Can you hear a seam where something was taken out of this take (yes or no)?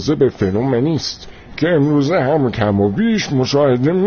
no